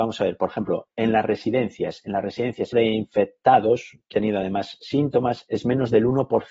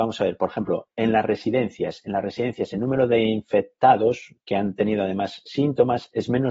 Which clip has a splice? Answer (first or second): first